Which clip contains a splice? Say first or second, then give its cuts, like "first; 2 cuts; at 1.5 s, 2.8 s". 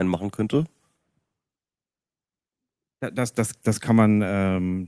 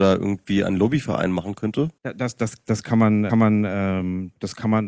second; 2 cuts; at 2.0 s, 3.3 s